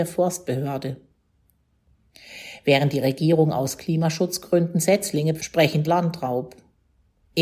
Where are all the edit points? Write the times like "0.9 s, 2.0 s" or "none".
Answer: 5.4 s, 5.8 s